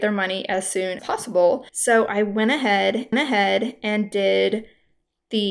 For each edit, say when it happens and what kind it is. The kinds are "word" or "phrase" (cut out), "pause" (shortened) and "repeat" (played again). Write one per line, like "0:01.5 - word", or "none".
0:01.0 - word
0:01.7 - pause
0:03.1 - repeat